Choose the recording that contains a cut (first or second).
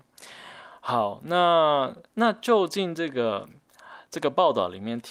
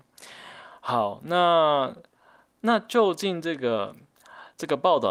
first